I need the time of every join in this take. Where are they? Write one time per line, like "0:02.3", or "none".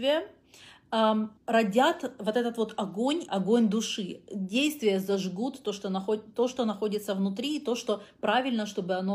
0:01.4
0:03.3